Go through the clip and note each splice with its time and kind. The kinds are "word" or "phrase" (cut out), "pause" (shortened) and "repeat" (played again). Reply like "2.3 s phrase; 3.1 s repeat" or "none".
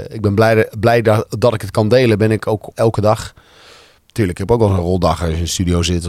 2.7 s word